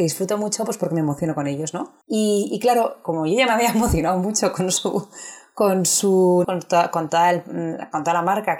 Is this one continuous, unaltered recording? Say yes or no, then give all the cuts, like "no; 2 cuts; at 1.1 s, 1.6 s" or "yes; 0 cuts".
no; 2 cuts; at 2.0 s, 6.4 s